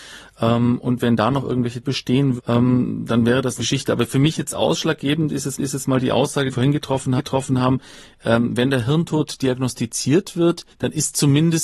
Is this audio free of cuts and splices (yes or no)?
no